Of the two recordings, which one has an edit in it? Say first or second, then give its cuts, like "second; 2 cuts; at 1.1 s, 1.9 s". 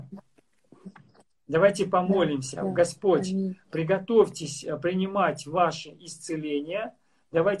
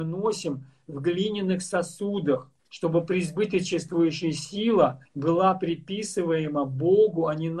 second; 2 cuts; at 2.6 s, 5.0 s